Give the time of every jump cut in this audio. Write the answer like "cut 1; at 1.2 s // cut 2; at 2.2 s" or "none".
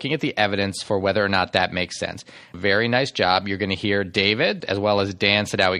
cut 1; at 2.5 s // cut 2; at 4.6 s